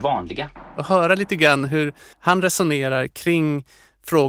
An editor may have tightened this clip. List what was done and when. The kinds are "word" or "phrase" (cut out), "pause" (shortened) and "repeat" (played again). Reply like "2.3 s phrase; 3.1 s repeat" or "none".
2.1 s pause